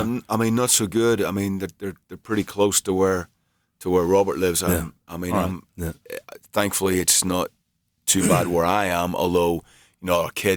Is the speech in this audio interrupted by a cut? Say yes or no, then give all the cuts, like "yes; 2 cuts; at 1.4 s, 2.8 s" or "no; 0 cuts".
no; 0 cuts